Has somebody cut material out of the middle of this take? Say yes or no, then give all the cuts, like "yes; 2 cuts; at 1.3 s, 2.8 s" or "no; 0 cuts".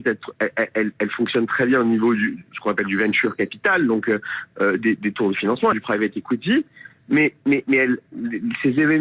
yes; 1 cut; at 5.7 s